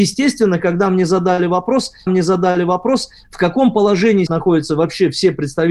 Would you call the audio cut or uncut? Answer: cut